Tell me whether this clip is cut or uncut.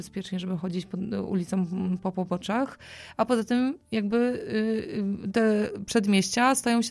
uncut